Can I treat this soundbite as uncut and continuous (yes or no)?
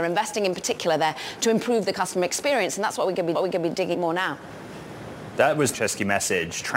no